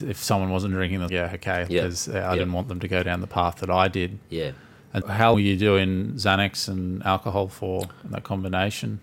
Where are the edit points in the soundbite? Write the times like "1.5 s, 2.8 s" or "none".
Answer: 1.1 s, 1.7 s, 5.0 s, 5.3 s